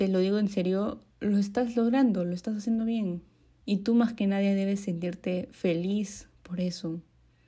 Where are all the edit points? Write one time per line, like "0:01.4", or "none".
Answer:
0:01.1
0:03.5
0:06.3